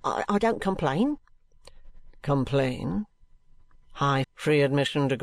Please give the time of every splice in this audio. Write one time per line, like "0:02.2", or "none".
0:04.2